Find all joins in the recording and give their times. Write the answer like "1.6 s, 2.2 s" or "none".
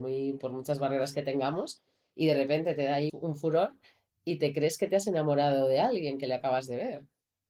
3.1 s